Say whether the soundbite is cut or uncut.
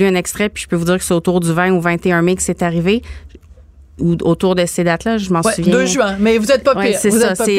uncut